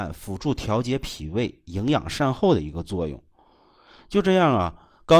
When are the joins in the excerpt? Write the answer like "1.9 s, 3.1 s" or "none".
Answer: none